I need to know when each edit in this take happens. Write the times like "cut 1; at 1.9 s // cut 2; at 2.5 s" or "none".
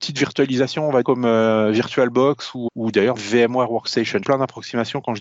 cut 1; at 1.0 s // cut 2; at 2.7 s // cut 3; at 3.2 s // cut 4; at 4.2 s